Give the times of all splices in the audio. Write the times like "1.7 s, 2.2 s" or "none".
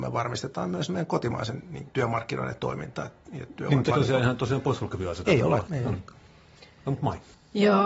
1.8 s, 3.9 s, 5.3 s, 5.7 s